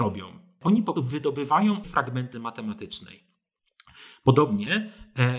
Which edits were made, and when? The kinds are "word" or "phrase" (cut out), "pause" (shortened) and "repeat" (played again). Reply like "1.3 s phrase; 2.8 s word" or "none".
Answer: 1.0 s word; 1.8 s word; 2.3 s word